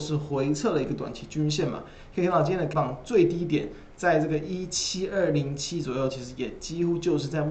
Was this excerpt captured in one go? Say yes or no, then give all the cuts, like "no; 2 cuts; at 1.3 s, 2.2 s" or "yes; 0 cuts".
no; 1 cut; at 2.7 s